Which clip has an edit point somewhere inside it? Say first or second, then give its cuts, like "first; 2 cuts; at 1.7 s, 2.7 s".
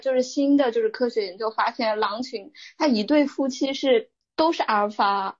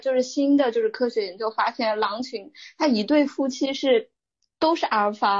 first; 1 cut; at 4.2 s